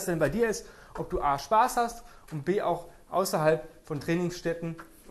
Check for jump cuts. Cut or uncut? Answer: uncut